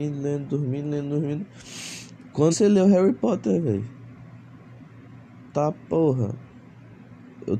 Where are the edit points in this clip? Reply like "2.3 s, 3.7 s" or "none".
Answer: 2.5 s